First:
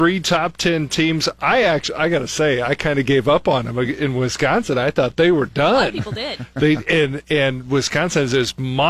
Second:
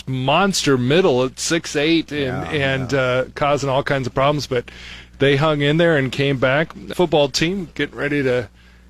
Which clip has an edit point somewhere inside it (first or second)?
second